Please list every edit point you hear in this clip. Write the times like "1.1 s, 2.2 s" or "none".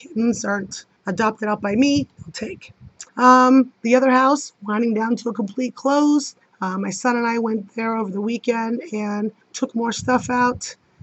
1.0 s, 3.1 s, 6.4 s, 9.4 s